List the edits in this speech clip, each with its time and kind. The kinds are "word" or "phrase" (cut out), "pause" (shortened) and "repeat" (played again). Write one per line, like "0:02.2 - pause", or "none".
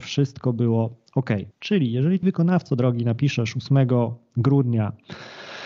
0:01.5 - pause
0:02.2 - word